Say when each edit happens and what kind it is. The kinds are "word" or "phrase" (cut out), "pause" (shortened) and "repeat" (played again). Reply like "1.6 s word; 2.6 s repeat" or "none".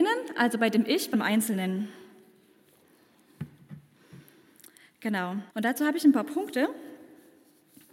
1.1 s word; 5.5 s pause